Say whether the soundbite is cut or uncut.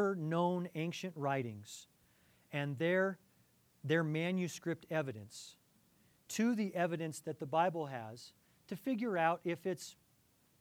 uncut